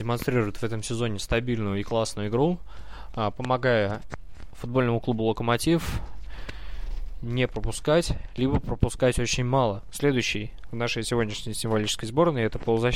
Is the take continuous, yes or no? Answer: yes